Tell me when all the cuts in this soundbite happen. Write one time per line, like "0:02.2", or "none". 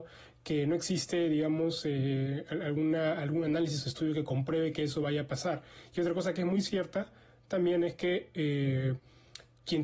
none

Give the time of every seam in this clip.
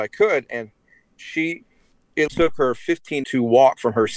0:02.3
0:03.2

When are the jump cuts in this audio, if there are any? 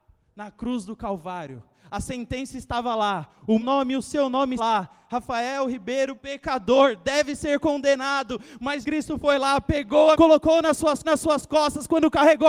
0:03.6
0:04.6
0:06.1
0:08.8
0:10.1
0:11.0

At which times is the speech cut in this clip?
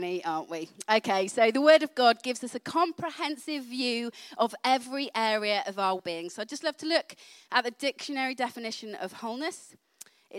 0:06.0

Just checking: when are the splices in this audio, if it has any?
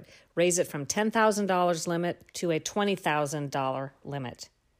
0:02.3

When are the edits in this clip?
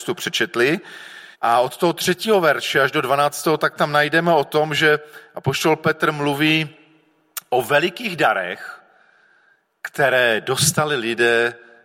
0:01.3

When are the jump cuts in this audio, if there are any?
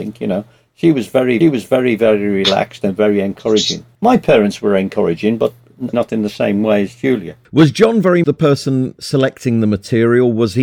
0:01.4
0:03.9
0:05.9
0:07.4
0:08.2

